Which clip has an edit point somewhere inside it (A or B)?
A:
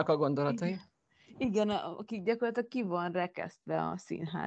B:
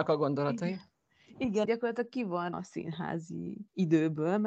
B